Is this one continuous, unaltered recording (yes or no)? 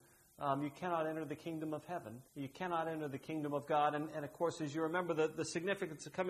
no